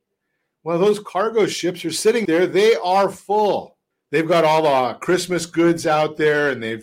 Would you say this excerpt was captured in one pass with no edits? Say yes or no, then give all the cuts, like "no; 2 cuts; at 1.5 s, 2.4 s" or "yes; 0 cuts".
no; 2 cuts; at 2.2 s, 3.9 s